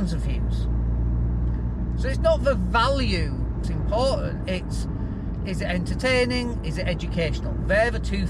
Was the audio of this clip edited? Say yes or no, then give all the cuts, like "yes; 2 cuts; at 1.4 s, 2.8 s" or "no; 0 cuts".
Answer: yes; 1 cut; at 3.6 s